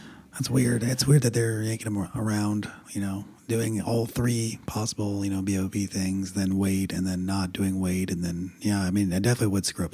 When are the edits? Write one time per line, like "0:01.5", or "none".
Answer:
0:02.8